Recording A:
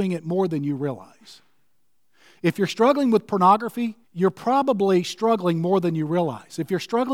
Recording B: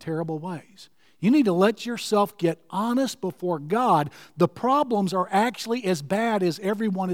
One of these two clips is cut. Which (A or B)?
A